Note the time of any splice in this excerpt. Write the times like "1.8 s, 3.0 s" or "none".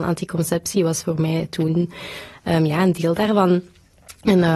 none